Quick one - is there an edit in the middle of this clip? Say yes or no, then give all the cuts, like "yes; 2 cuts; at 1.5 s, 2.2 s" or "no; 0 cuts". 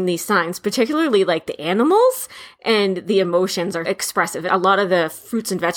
yes; 2 cuts; at 3.8 s, 4.5 s